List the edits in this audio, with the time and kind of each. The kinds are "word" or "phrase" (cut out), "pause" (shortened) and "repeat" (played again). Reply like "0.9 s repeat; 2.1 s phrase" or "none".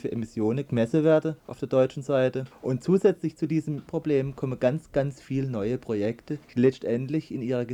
1.4 s pause; 2.5 s pause; 3.9 s phrase; 6.4 s pause